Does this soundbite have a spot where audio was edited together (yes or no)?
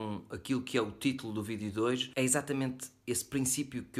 no